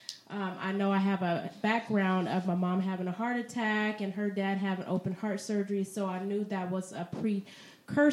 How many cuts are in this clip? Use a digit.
0